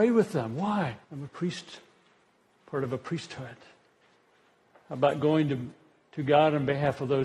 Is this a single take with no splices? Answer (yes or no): no